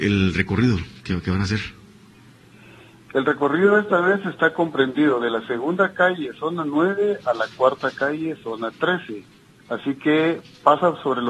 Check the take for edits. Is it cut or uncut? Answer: uncut